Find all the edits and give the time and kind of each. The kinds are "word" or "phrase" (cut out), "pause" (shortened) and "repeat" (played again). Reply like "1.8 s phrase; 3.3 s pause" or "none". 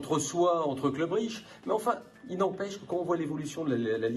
none